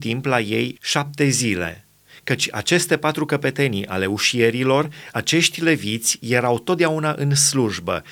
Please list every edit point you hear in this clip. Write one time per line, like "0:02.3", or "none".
none